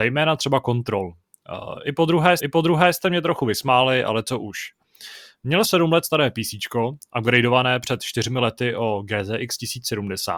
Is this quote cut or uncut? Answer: cut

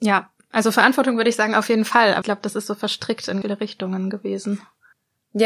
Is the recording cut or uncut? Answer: cut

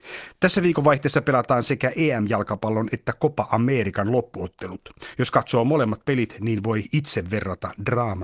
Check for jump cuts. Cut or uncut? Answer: uncut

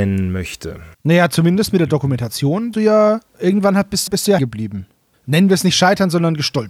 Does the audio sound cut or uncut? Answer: cut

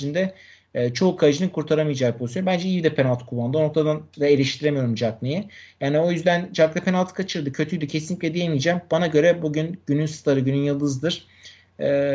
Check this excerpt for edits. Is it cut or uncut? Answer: uncut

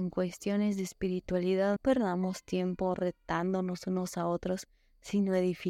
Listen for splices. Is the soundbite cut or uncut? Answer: cut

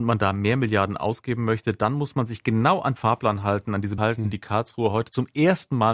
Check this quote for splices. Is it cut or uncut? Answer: cut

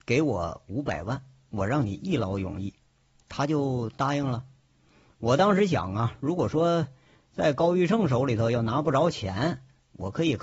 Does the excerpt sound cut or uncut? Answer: uncut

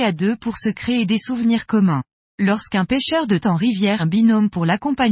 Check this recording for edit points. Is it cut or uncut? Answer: cut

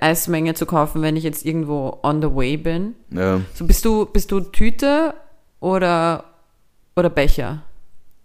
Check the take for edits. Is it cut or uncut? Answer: uncut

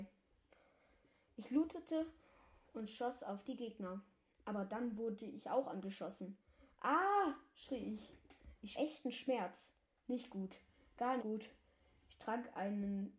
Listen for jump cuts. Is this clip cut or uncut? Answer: cut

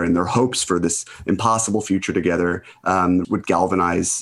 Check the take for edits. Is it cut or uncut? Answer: cut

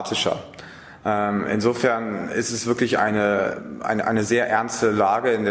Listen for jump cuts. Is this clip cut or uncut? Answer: uncut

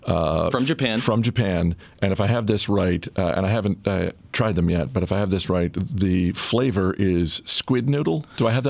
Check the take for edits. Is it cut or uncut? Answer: uncut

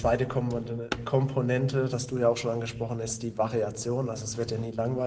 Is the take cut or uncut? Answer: cut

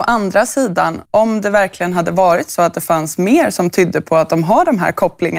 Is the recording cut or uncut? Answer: cut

